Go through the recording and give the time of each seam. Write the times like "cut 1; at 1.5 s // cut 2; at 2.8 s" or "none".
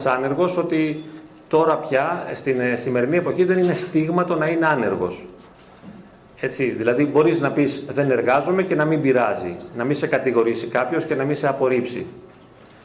none